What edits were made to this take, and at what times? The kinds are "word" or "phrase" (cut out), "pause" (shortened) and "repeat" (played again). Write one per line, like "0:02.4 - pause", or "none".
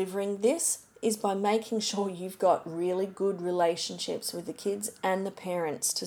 none